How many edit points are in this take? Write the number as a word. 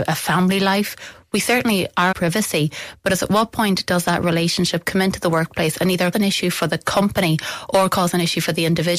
two